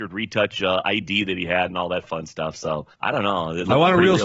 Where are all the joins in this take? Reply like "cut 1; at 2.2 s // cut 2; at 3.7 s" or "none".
cut 1; at 2.9 s

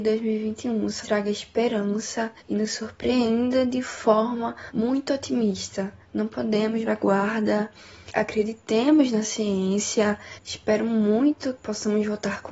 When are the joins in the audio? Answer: cut 1; at 1.0 s // cut 2; at 2.4 s // cut 3; at 4.7 s // cut 4; at 6.0 s // cut 5; at 6.9 s // cut 6; at 8.1 s // cut 7; at 10.4 s // cut 8; at 11.6 s

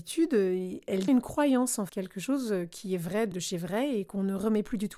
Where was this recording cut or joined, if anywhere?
cut 1; at 1.1 s // cut 2; at 1.9 s // cut 3; at 3.3 s

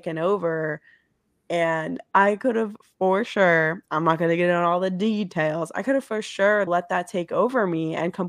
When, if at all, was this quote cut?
cut 1; at 6.7 s

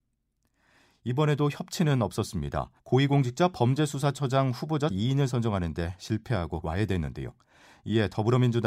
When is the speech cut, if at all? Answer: cut 1; at 2.8 s // cut 2; at 4.9 s // cut 3; at 6.6 s

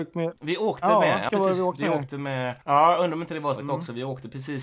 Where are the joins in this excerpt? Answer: cut 1; at 1.3 s // cut 2; at 2.6 s // cut 3; at 3.6 s

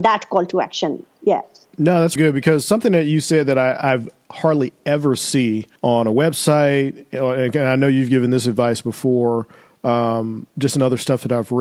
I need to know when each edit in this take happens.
cut 1; at 2.2 s // cut 2; at 5.8 s

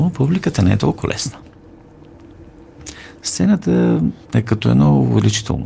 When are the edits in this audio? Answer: cut 1; at 4.2 s

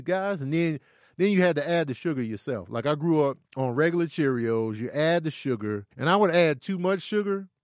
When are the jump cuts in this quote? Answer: cut 1; at 3.4 s // cut 2; at 5.9 s

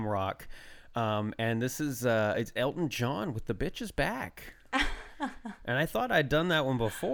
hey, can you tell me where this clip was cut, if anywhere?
none

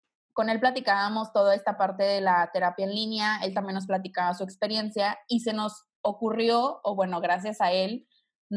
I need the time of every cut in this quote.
cut 1; at 5.9 s

